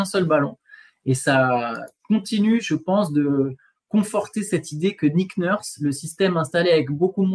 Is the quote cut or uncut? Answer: uncut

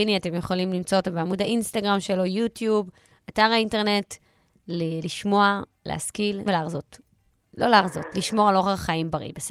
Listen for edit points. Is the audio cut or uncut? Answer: cut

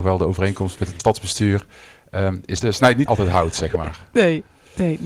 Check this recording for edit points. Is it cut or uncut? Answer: cut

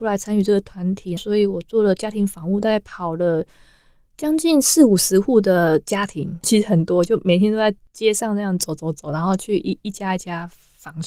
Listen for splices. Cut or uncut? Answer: cut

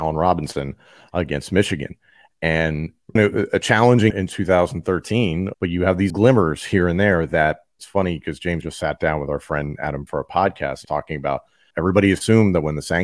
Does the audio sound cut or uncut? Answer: cut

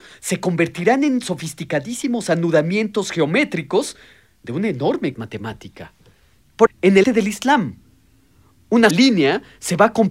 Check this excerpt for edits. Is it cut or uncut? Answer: cut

